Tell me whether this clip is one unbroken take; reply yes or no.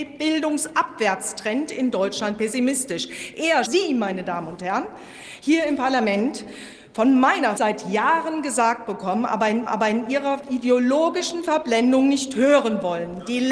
no